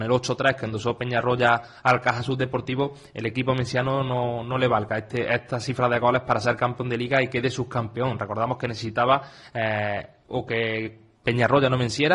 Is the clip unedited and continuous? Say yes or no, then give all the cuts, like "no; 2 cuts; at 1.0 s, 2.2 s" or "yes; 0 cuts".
yes; 0 cuts